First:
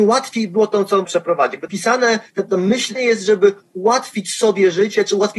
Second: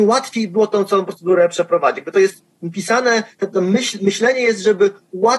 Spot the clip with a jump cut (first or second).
first